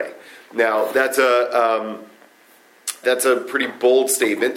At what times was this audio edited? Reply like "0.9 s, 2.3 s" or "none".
3.0 s